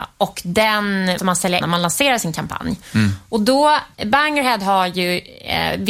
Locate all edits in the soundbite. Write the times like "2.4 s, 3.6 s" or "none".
1.2 s, 1.6 s, 3.9 s

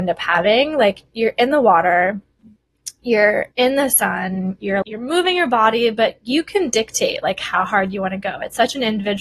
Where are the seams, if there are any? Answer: 3.5 s, 4.8 s

